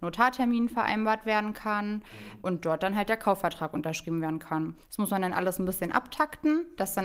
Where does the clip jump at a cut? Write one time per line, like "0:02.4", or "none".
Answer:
0:04.8

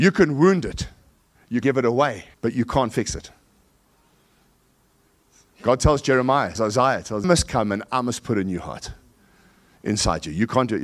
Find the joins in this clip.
0:01.6
0:02.3
0:06.5
0:07.2

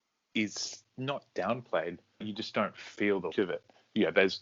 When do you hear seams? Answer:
0:02.2
0:03.3

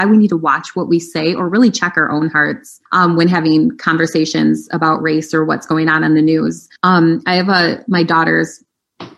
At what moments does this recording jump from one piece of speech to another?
0:02.9
0:06.8

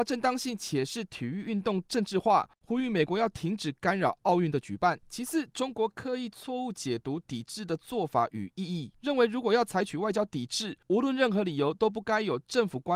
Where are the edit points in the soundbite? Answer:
0:05.0

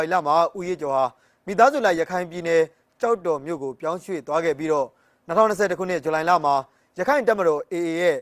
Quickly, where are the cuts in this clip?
none

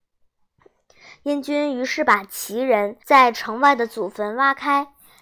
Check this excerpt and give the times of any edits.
0:03.0

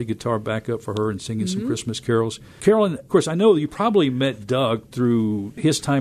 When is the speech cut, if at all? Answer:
none

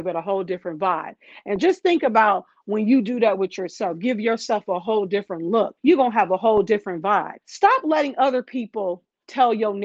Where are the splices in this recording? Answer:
0:05.8
0:07.4

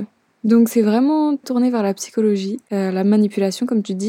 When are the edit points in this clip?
0:01.4

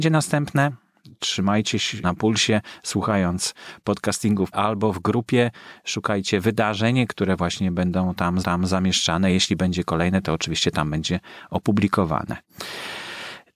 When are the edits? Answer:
0:02.0
0:04.5
0:07.1
0:08.4

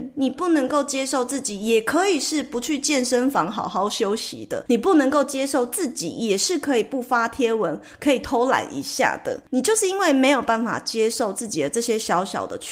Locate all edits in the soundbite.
none

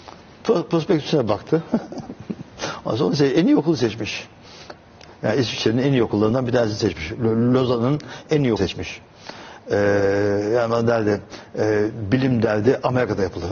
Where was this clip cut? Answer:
0:08.6

